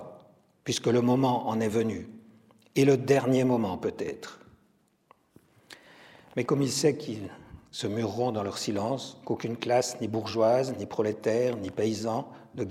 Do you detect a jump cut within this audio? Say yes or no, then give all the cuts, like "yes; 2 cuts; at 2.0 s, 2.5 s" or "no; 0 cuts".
no; 0 cuts